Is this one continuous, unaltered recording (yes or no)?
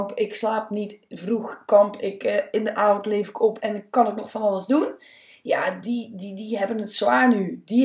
yes